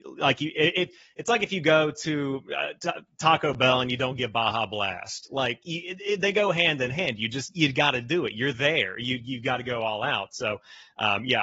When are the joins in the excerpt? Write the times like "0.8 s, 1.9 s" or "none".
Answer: none